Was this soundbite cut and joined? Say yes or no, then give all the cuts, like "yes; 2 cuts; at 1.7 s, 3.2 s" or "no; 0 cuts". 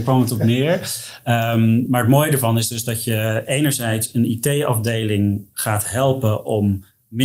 no; 0 cuts